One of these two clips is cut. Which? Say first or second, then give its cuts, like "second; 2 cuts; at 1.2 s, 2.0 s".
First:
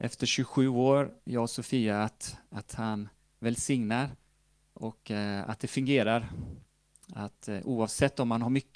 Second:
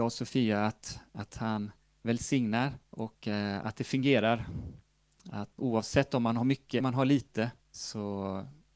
second; 4 cuts; at 2.8 s, 5.6 s, 6.8 s, 7.6 s